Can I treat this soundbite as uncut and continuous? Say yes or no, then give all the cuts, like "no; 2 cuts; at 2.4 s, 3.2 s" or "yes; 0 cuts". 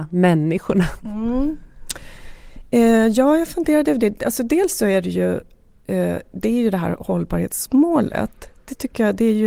yes; 0 cuts